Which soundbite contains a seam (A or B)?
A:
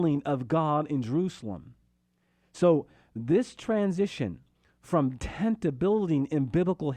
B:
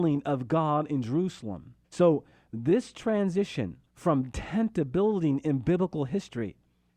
B